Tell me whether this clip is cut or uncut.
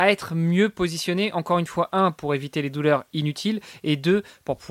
uncut